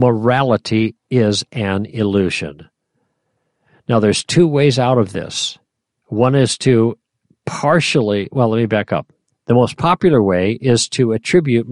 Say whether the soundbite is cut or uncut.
uncut